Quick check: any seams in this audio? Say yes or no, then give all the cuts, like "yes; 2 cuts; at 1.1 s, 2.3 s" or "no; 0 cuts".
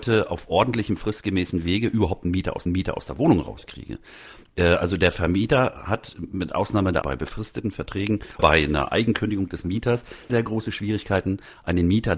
yes; 4 cuts; at 2.6 s, 7.0 s, 8.4 s, 10.3 s